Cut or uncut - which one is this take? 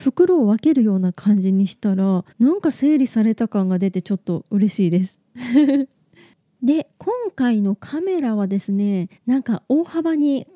cut